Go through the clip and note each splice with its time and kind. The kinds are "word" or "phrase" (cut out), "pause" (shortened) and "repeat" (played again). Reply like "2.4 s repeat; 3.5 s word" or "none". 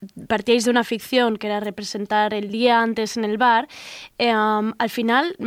none